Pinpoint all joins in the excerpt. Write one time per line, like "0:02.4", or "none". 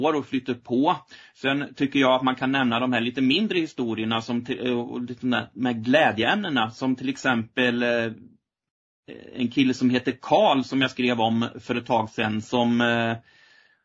none